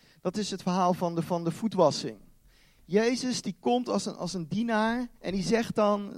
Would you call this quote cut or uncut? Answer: cut